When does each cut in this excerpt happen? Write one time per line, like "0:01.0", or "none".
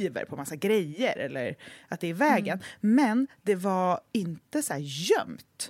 none